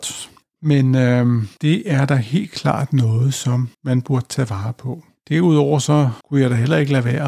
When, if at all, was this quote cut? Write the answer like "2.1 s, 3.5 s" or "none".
1.5 s, 3.7 s, 6.2 s